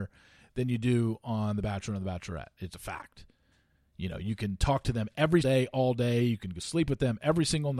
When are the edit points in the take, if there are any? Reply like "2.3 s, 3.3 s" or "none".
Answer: 2.7 s, 5.4 s